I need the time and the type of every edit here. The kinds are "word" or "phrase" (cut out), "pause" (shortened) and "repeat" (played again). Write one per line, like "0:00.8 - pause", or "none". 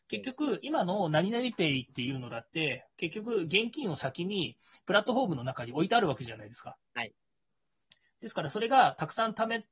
none